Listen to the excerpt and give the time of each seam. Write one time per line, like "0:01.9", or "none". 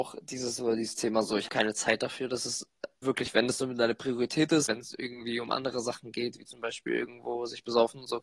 0:01.5
0:03.0
0:04.7